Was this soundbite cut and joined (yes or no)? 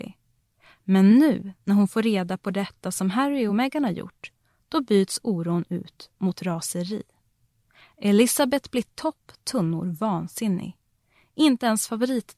no